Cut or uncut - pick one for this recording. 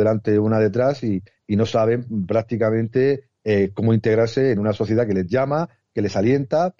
uncut